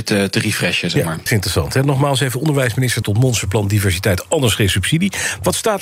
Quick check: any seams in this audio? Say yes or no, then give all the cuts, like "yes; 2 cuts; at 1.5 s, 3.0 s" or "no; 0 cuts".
yes; 2 cuts; at 1.3 s, 3.0 s